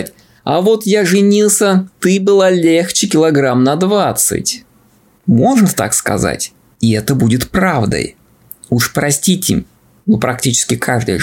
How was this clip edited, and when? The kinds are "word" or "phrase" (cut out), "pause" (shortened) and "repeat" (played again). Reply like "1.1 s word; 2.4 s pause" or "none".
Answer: none